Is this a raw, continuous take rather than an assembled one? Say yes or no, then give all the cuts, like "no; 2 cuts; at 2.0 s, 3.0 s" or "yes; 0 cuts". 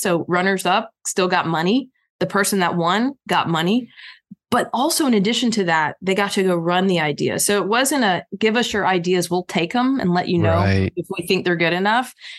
yes; 0 cuts